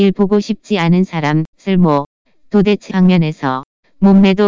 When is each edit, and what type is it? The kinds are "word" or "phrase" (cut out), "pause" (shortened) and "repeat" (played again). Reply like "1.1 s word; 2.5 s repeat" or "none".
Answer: 1.5 s pause; 2.9 s word